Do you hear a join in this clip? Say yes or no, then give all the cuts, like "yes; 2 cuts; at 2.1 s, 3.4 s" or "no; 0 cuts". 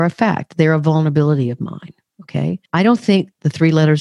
yes; 1 cut; at 2.7 s